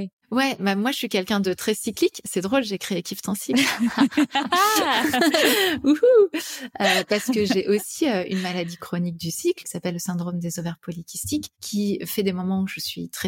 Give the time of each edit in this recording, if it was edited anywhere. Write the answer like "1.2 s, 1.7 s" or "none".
none